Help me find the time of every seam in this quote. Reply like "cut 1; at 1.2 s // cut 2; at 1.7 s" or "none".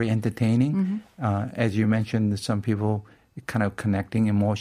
none